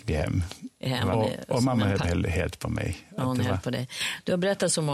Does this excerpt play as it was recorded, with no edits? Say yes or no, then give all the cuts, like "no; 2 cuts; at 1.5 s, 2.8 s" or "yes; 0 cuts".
no; 2 cuts; at 1.1 s, 2.0 s